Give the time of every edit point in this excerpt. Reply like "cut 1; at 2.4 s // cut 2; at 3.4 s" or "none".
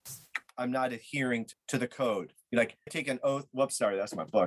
cut 1; at 1.5 s // cut 2; at 2.9 s